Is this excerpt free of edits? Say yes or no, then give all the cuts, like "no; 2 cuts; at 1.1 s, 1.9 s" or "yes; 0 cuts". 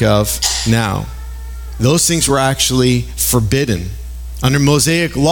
yes; 0 cuts